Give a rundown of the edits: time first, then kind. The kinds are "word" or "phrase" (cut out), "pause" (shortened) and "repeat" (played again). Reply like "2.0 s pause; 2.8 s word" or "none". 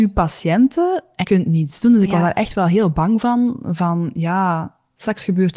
1.2 s word